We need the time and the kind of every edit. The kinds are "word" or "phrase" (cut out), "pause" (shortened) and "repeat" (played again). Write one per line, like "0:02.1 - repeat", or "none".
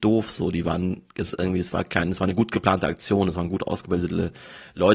none